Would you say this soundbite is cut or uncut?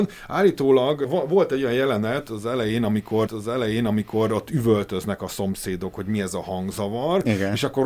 cut